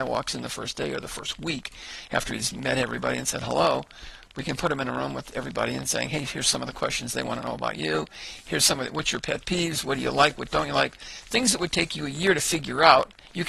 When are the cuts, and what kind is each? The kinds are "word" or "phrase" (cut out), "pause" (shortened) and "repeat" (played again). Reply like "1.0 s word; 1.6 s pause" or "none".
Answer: none